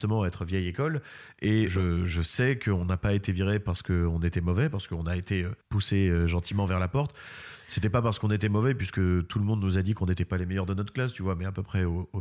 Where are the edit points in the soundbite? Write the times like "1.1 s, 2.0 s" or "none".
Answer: 5.6 s